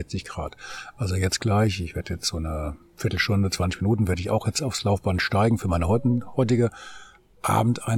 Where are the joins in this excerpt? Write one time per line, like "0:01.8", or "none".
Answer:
none

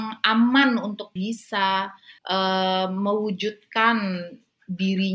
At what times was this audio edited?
0:01.2
0:02.2

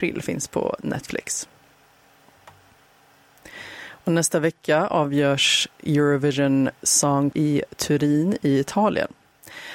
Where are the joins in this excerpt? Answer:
0:07.3

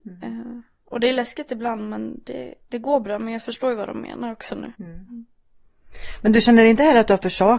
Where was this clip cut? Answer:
0:04.7

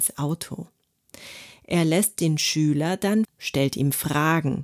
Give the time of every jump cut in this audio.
0:03.2

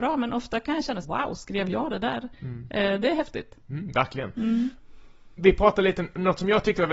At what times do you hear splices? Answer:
0:01.0

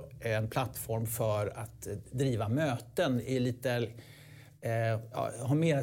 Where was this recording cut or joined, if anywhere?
none

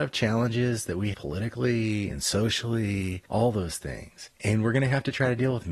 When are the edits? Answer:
0:01.1
0:03.3
0:04.3

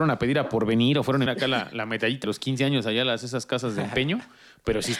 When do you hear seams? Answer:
0:01.3
0:02.2

